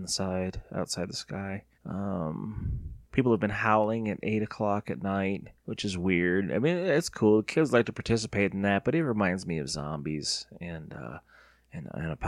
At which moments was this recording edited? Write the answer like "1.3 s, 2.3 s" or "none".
1.7 s, 5.6 s